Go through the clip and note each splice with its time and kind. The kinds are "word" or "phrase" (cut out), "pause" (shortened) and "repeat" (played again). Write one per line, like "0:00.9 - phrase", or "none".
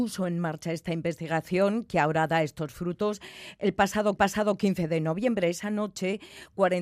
0:04.2 - repeat